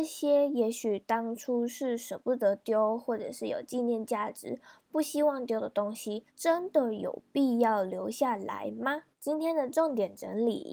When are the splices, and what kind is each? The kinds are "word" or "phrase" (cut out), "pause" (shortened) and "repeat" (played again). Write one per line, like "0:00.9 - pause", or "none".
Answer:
0:06.3 - pause
0:09.1 - pause